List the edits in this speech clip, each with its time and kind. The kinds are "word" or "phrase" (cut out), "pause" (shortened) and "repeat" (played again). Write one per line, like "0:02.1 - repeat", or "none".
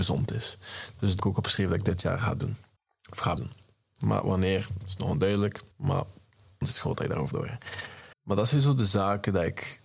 0:01.2 - phrase
0:02.8 - pause
0:03.4 - word
0:05.7 - pause
0:06.6 - word
0:07.3 - word
0:08.1 - pause

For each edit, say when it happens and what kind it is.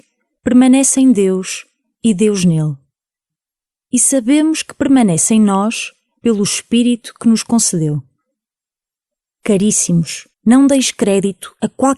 0:10.3 - pause

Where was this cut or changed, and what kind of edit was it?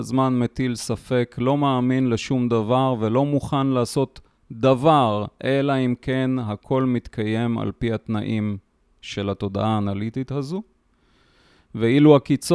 none

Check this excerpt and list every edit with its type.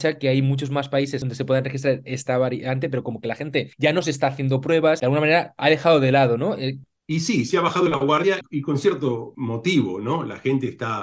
none

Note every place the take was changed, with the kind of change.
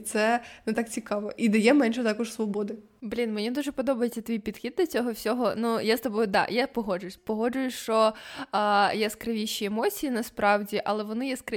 0:07.2 - word

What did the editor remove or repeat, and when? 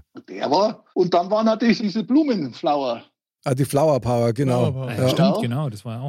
0:00.9 - pause
0:01.8 - word

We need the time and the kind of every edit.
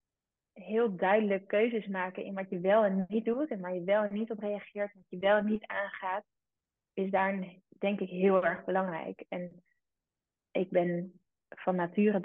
0:07.6 - pause

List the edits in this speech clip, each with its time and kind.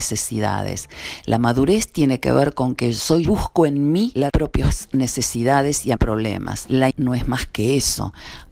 0:03.2 - phrase
0:04.3 - phrase
0:06.0 - phrase
0:06.9 - word

